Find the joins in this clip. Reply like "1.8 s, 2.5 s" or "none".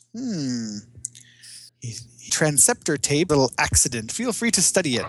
1.7 s, 2.3 s, 3.3 s